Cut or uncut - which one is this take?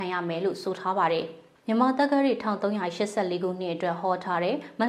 cut